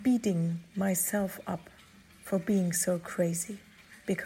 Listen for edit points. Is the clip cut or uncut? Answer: uncut